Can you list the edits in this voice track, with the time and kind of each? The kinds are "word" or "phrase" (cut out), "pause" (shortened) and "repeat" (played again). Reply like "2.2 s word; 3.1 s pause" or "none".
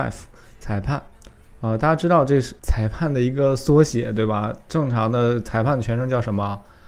none